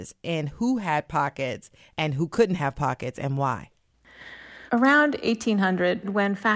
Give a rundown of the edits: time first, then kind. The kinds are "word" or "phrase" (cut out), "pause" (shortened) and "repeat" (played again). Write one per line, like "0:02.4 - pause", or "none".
none